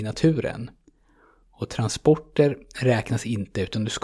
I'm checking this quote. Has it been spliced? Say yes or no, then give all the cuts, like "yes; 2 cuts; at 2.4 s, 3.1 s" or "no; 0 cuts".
no; 0 cuts